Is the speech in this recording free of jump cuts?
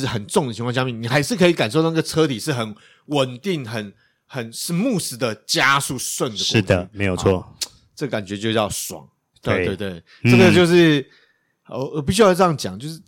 yes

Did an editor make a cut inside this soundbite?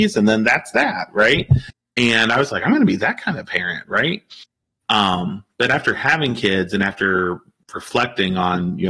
no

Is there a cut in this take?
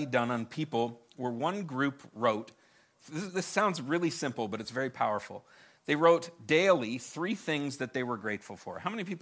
no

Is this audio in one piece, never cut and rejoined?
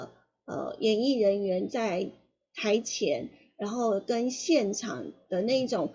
yes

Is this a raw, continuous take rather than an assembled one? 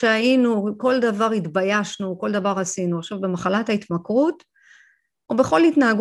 yes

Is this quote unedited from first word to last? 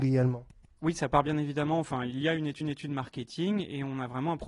no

